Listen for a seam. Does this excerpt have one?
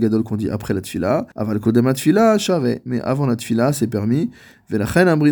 yes; 1 cut; at 1.3 s

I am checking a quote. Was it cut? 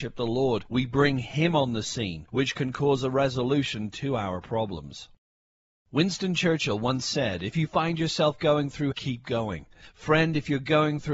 yes; 1 cut; at 8.9 s

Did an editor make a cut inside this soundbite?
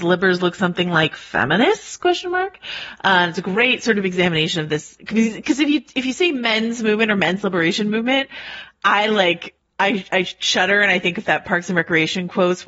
yes; 1 cut; at 9.6 s

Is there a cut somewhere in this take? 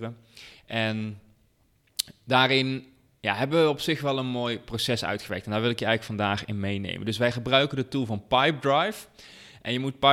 no; 0 cuts

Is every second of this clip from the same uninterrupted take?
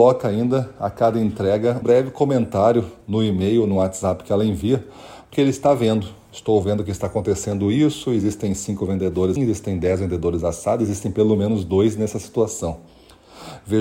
no; 3 cuts; at 1.8 s, 5.3 s, 9.4 s

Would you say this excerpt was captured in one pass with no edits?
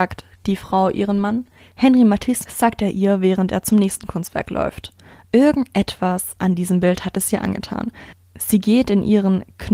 no; 1 cut; at 2.5 s

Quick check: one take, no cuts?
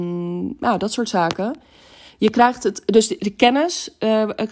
yes; 0 cuts

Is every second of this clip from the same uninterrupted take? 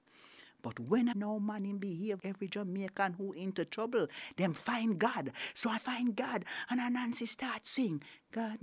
no; 3 cuts; at 1.1 s, 2.2 s, 5.8 s

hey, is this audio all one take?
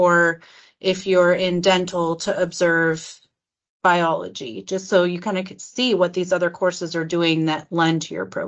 yes; 0 cuts

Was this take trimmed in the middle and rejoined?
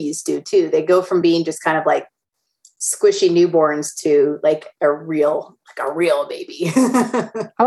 no; 0 cuts

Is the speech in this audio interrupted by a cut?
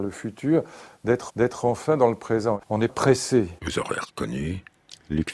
yes; 3 cuts; at 1.3 s, 2.9 s, 3.6 s

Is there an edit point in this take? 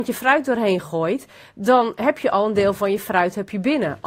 no; 0 cuts

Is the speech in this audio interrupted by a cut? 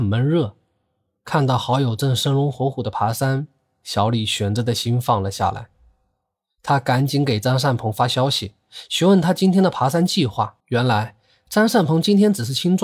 yes; 1 cut; at 10.6 s

